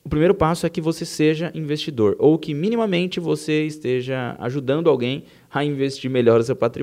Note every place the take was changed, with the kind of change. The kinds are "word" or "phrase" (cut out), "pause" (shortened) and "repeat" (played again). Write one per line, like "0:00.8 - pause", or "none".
none